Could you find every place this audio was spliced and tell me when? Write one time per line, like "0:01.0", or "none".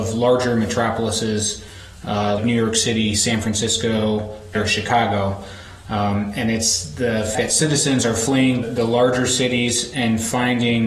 0:02.4
0:04.5
0:07.3
0:08.6